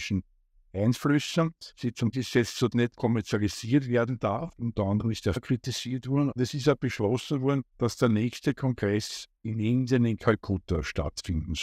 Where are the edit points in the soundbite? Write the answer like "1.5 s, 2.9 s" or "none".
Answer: 1.7 s, 2.1 s, 2.7 s, 5.4 s, 6.4 s, 7.7 s, 9.3 s